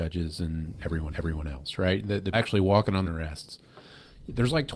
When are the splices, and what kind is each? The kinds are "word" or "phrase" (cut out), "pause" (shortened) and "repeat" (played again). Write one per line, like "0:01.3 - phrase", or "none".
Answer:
0:01.1 - repeat
0:02.3 - word
0:03.0 - phrase